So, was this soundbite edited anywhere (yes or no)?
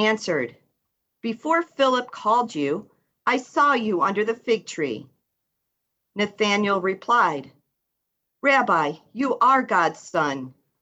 no